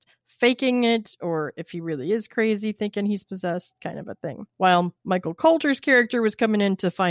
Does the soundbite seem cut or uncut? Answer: cut